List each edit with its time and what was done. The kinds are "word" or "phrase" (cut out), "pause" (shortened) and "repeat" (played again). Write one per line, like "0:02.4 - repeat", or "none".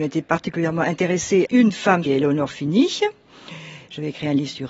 0:01.5 - word
0:02.1 - phrase